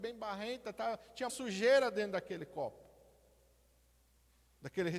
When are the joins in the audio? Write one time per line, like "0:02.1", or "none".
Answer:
0:01.3